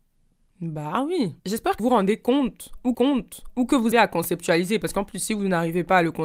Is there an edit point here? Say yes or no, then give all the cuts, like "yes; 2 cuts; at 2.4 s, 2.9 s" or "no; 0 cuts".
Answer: yes; 4 cuts; at 1.4 s, 1.8 s, 2.9 s, 3.9 s